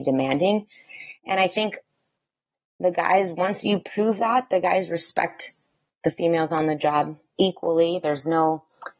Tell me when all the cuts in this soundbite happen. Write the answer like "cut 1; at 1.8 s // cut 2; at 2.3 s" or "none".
none

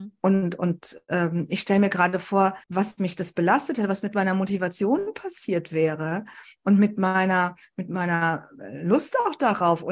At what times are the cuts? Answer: cut 1; at 2.6 s

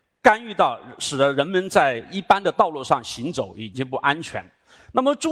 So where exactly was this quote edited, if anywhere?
none

